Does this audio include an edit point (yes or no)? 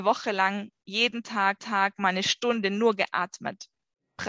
yes